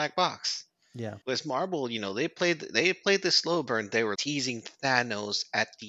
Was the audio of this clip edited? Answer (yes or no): yes